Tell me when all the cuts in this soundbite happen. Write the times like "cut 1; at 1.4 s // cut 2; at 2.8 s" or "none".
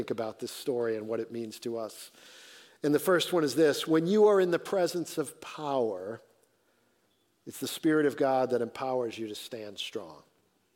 none